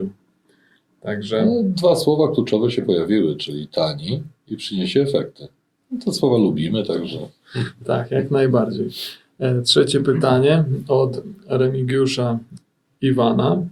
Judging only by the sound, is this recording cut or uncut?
uncut